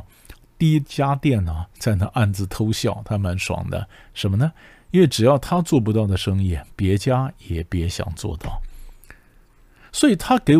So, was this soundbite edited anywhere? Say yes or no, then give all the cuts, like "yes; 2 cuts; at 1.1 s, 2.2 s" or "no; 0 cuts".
no; 0 cuts